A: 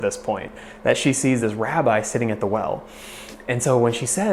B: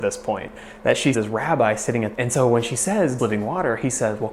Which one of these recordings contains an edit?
B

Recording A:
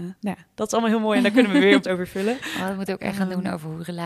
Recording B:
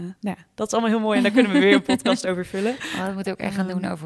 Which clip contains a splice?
A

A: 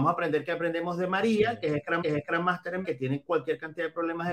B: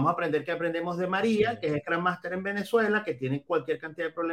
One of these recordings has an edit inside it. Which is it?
A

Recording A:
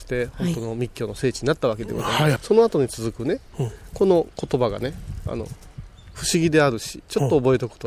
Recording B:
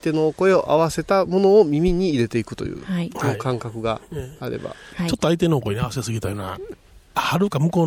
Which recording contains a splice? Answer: A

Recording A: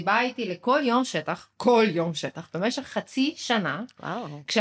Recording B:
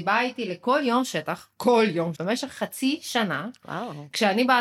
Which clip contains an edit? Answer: B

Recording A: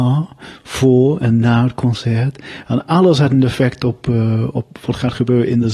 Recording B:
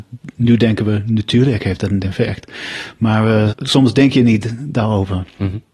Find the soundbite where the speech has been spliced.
B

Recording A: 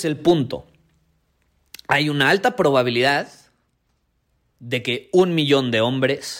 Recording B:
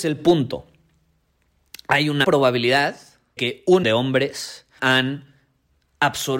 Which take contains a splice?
B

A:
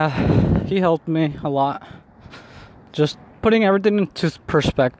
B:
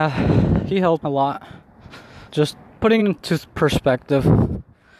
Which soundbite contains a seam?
B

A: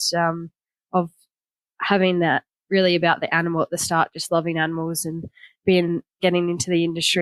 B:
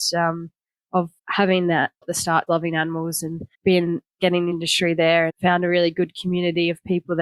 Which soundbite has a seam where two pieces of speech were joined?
B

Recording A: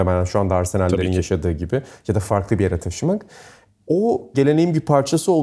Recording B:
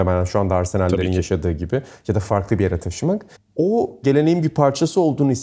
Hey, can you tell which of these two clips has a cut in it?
B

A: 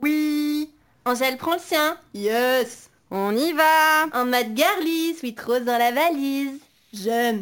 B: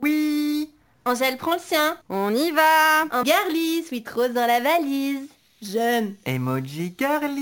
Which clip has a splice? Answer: B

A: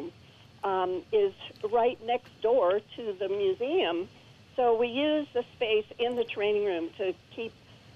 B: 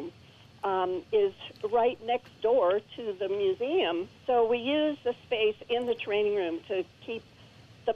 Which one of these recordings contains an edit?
B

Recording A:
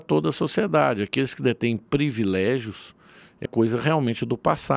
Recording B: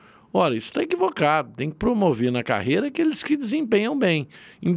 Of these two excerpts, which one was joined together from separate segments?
A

